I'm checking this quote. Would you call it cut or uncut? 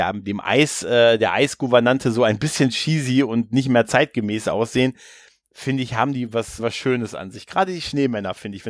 cut